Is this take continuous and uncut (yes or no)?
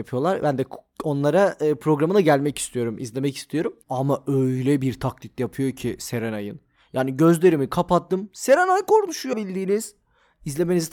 no